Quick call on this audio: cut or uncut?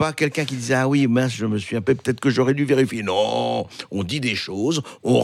cut